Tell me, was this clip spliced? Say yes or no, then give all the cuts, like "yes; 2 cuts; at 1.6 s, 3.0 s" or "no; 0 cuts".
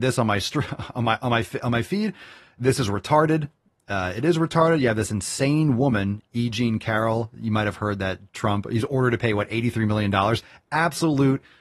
no; 0 cuts